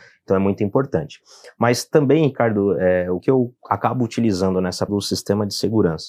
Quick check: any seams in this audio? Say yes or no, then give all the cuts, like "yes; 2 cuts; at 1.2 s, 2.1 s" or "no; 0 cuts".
yes; 3 cuts; at 3.2 s, 3.6 s, 4.9 s